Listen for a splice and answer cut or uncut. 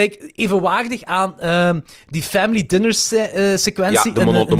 uncut